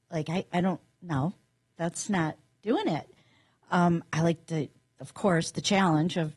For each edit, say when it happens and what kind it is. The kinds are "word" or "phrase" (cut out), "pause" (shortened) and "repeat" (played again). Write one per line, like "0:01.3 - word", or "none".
none